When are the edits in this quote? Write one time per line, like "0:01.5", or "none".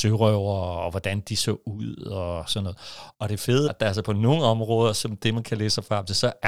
0:03.1
0:03.7